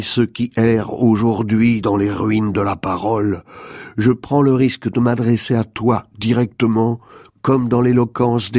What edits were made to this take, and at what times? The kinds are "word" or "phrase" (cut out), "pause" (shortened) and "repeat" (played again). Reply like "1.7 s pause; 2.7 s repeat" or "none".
none